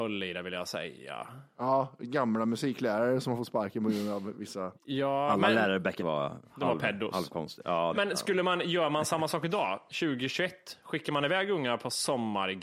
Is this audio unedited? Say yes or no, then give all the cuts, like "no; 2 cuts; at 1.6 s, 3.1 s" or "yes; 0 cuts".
no; 3 cuts; at 4.8 s, 6.0 s, 7.9 s